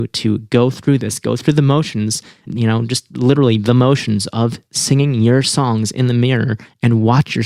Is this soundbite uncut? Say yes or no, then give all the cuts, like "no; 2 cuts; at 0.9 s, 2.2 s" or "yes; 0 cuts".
yes; 0 cuts